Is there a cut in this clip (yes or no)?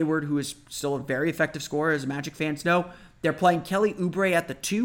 no